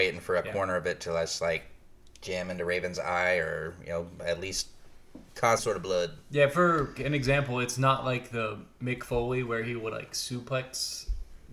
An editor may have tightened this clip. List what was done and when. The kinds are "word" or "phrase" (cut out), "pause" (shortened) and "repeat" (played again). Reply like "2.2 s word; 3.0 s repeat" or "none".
5.6 s word; 7.0 s word